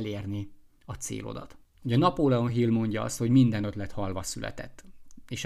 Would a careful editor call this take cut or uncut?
uncut